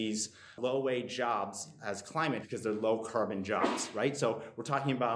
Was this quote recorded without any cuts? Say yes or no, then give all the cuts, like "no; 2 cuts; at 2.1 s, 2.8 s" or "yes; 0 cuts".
no; 1 cut; at 2.4 s